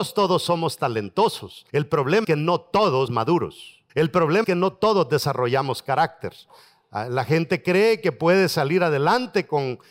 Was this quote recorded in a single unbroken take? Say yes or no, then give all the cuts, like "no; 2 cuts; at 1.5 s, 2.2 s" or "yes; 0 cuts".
no; 5 cuts; at 1.7 s, 2.2 s, 3.1 s, 3.9 s, 4.4 s